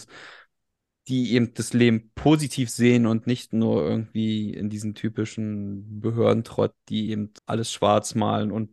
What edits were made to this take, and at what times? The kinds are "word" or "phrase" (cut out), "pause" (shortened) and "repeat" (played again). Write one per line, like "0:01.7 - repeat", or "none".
0:07.4 - pause